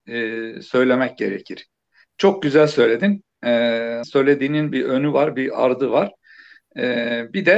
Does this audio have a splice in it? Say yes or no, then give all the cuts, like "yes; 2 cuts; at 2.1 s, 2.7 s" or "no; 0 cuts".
yes; 1 cut; at 4.0 s